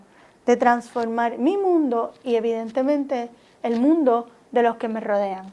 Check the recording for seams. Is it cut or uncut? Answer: uncut